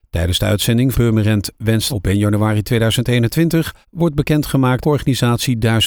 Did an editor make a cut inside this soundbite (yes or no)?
yes